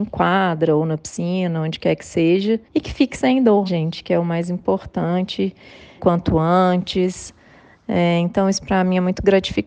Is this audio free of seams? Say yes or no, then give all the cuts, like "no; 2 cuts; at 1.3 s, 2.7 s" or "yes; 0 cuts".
no; 3 cuts; at 2.6 s, 3.7 s, 6.0 s